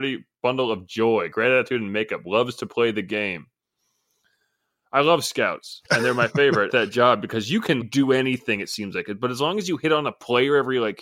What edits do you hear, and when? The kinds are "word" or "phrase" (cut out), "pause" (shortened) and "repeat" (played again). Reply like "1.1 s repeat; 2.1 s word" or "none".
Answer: 5.9 s pause; 6.7 s phrase; 7.8 s word